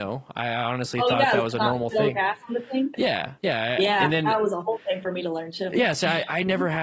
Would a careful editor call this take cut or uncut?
cut